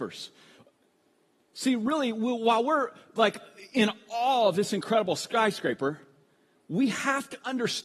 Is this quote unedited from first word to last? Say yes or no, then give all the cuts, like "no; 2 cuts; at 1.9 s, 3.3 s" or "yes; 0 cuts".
yes; 0 cuts